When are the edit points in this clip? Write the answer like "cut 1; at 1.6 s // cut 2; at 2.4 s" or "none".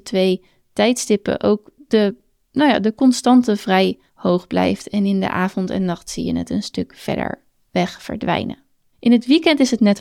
cut 1; at 4.1 s